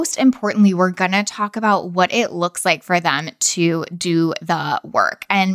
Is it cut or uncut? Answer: uncut